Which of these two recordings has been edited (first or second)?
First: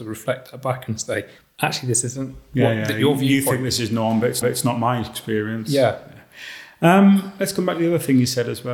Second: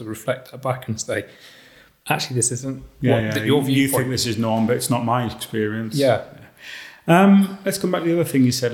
first